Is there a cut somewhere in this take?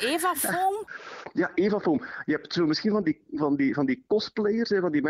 no; 0 cuts

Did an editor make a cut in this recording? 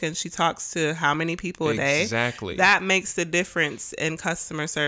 no; 0 cuts

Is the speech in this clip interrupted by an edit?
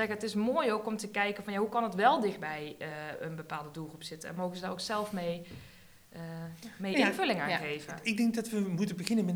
no; 0 cuts

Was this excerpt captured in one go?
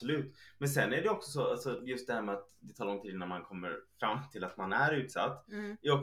yes; 0 cuts

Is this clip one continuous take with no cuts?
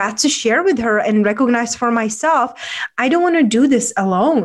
yes; 0 cuts

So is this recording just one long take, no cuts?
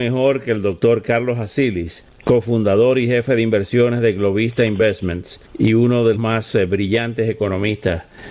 no; 1 cut; at 6.1 s

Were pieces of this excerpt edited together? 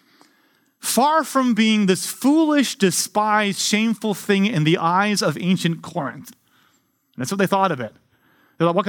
no; 0 cuts

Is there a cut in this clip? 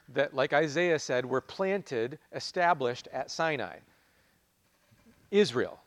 no; 0 cuts

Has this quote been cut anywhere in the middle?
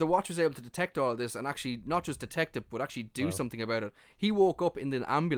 no; 0 cuts

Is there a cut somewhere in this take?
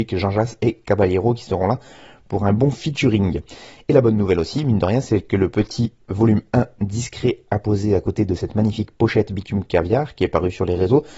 no; 0 cuts

